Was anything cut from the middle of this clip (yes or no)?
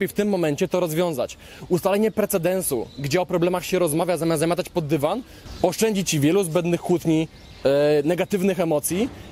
no